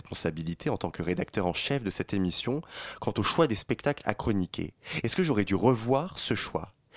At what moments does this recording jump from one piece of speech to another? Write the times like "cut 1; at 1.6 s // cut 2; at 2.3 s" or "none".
none